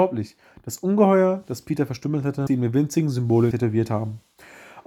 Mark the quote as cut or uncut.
cut